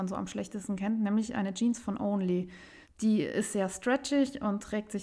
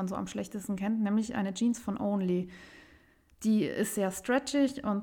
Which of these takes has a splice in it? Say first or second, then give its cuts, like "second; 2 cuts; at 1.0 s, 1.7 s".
first; 1 cut; at 2.8 s